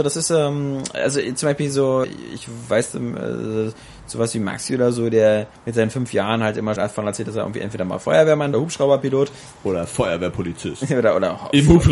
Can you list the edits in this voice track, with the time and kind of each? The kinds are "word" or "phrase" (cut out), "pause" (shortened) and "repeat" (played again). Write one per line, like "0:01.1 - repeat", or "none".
0:02.0 - word
0:06.8 - word
0:08.5 - phrase